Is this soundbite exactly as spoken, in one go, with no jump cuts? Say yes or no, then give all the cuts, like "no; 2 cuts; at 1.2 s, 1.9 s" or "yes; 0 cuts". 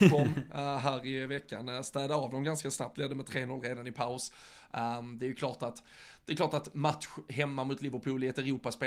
yes; 0 cuts